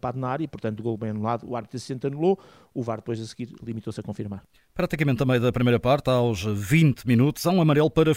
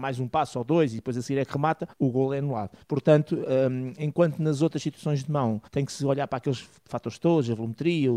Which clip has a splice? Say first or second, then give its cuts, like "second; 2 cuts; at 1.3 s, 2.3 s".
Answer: second; 3 cuts; at 1.9 s, 2.8 s, 5.7 s